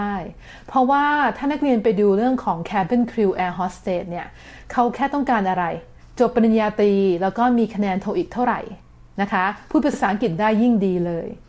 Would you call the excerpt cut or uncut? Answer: uncut